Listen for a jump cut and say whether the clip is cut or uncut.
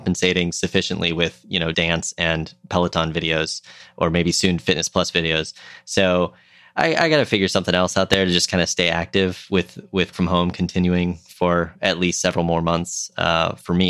cut